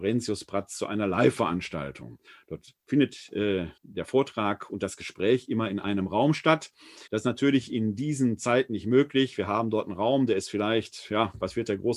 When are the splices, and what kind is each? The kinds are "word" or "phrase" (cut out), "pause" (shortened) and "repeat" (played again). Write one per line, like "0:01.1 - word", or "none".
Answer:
0:02.3 - pause
0:03.8 - pause
0:07.1 - pause

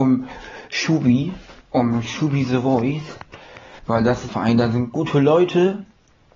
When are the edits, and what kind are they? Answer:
0:01.6 - pause
0:03.8 - pause
0:04.3 - phrase

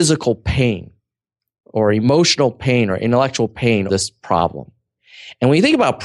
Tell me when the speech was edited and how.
0:03.9 - word

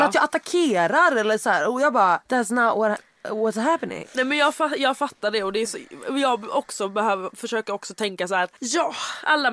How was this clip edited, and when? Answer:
0:02.3 - pause
0:08.6 - pause

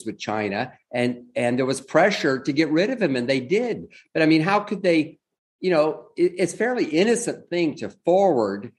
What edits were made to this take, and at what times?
none

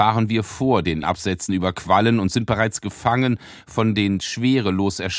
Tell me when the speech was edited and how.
0:01.0 - word

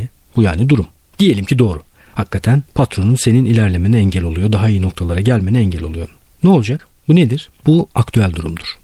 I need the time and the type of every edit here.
0:02.7 - pause
0:07.5 - pause

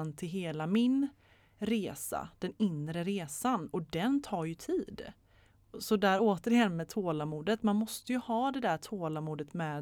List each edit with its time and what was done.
none

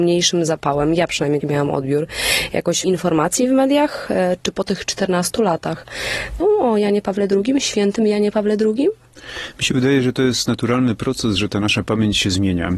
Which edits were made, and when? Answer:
0:01.4 - word
0:02.8 - word
0:04.4 - pause
0:06.4 - phrase

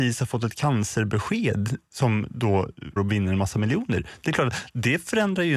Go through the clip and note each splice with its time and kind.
0:03.0 - word

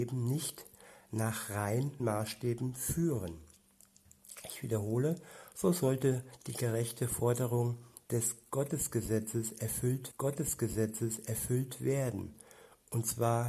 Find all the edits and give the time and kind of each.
0:02.0 - word
0:10.1 - repeat

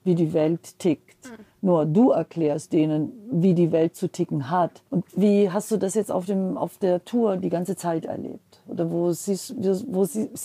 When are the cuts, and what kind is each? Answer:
0:04.9 - pause

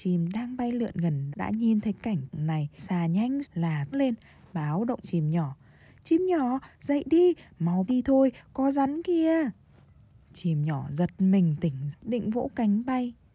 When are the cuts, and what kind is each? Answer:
0:01.3 - word
0:02.3 - word
0:02.8 - word
0:03.4 - word
0:03.9 - word
0:05.0 - word
0:07.9 - word
0:11.9 - word

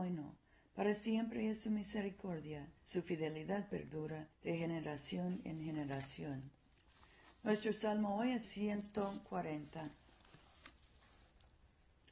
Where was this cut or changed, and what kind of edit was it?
0:02.8 - pause
0:04.3 - pause
0:08.4 - word

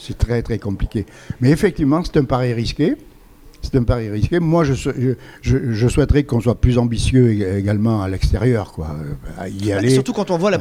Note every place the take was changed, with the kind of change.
none

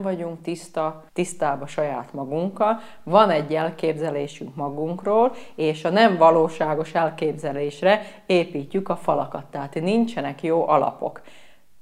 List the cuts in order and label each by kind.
0:01.1 - pause

